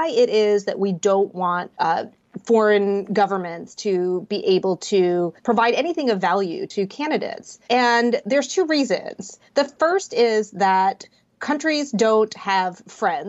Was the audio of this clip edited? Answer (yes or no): yes